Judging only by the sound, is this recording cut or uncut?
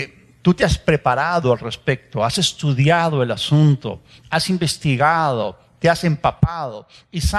uncut